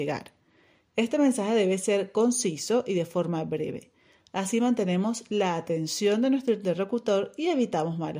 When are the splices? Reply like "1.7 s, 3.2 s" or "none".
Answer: none

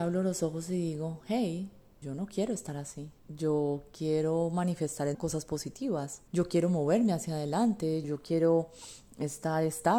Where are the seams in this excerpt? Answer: 2.0 s, 3.2 s, 5.1 s, 6.3 s, 8.0 s

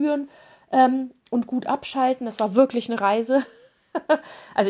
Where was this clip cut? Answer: 1.2 s

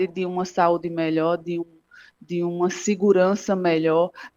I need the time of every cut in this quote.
none

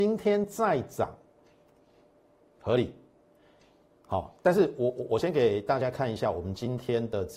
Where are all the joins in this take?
none

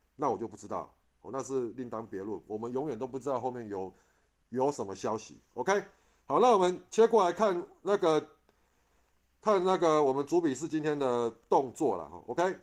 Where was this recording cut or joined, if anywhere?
none

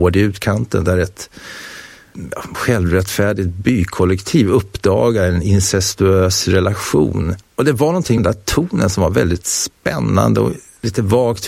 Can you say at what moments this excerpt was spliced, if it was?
2.5 s, 7.4 s, 8.2 s

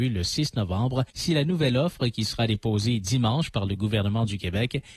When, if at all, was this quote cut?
1.1 s

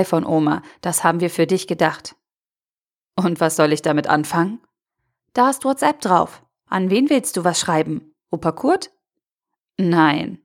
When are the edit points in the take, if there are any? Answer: none

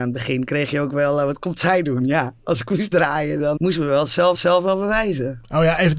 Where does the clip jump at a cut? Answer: 3.6 s, 4.3 s

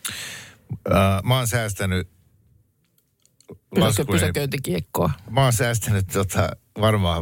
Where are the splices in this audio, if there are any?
none

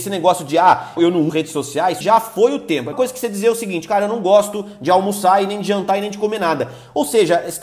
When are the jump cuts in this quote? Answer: 1.0 s, 1.3 s, 2.0 s, 2.9 s

